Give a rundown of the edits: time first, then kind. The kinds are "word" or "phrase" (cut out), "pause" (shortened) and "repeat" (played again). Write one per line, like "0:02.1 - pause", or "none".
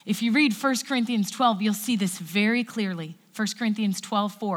none